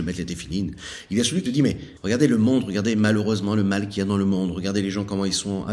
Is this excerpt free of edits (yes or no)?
no